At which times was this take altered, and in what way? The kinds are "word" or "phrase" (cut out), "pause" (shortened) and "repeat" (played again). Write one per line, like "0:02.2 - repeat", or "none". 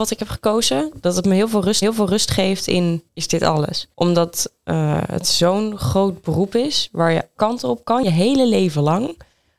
0:01.8 - repeat
0:03.1 - pause
0:03.9 - pause
0:07.3 - word